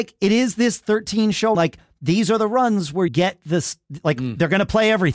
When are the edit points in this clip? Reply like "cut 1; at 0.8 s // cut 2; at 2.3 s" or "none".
cut 1; at 1.5 s // cut 2; at 3.1 s